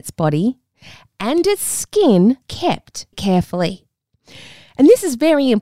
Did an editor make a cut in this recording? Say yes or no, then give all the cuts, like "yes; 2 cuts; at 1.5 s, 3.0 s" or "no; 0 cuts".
yes; 2 cuts; at 2.4 s, 3.1 s